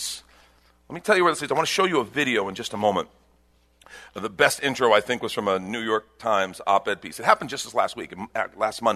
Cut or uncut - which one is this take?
uncut